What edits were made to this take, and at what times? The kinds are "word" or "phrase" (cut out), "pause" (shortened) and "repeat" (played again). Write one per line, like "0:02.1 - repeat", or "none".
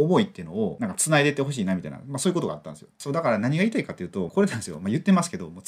0:04.3 - phrase